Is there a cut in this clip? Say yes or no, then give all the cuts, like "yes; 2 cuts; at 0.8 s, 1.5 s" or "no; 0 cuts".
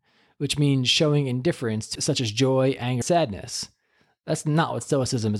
yes; 2 cuts; at 1.9 s, 3.0 s